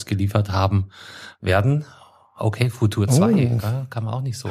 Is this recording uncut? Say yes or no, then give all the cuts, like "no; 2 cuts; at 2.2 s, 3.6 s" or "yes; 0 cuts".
yes; 0 cuts